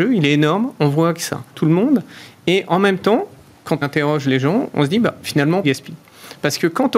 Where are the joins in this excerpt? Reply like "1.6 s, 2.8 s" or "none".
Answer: 1.5 s, 3.8 s, 5.6 s